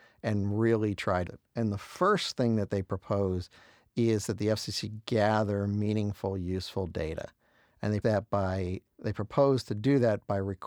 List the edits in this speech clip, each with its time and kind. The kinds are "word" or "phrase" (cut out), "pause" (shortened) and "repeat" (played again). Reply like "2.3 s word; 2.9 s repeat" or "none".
1.3 s word; 8.0 s word; 8.9 s word